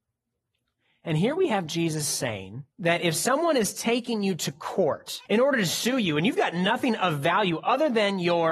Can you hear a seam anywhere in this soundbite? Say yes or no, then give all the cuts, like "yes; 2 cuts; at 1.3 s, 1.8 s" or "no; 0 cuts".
yes; 2 cuts; at 2.7 s, 5.3 s